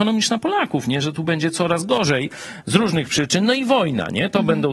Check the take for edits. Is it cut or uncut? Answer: uncut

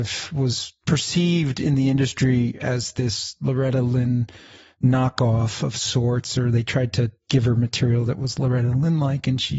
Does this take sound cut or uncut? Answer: uncut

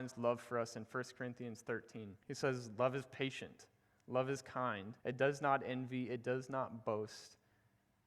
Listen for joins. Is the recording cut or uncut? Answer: cut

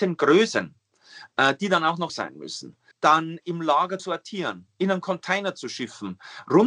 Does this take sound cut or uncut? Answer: cut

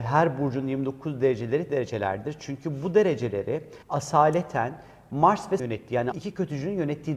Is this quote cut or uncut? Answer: cut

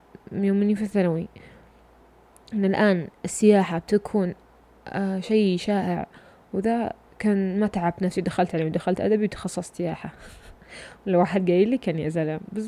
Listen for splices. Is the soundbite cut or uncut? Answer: uncut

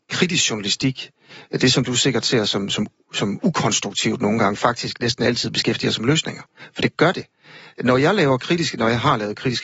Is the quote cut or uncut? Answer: uncut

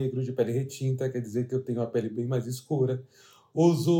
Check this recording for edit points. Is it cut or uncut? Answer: uncut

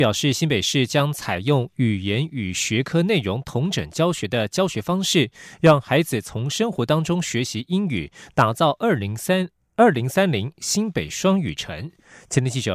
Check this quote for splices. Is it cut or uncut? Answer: uncut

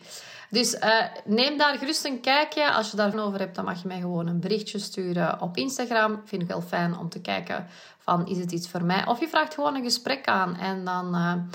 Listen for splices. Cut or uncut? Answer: cut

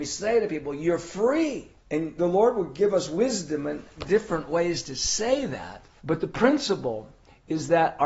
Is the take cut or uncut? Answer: cut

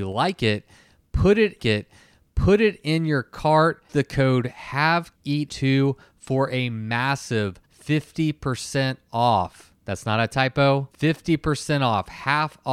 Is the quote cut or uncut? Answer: cut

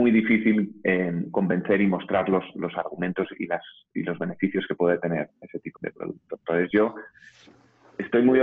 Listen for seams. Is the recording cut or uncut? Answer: cut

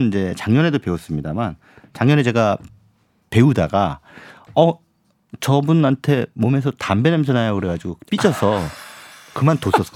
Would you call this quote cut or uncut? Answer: uncut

